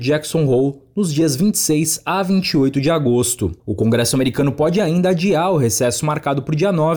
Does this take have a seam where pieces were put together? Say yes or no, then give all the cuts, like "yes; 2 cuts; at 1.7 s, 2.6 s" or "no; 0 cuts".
yes; 1 cut; at 3.6 s